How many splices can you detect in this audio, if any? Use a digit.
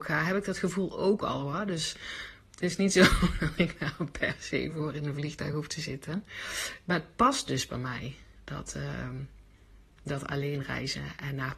0